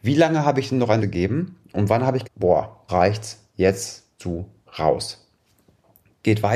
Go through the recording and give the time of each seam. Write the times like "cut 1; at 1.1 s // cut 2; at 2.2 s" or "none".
cut 1; at 1.0 s // cut 2; at 2.2 s // cut 3; at 2.9 s // cut 4; at 4.2 s